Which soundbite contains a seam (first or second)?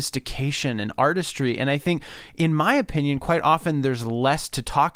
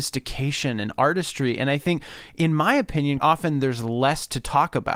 second